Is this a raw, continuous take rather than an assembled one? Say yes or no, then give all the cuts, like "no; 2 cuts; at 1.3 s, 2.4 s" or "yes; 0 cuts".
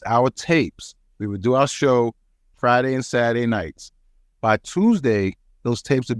yes; 0 cuts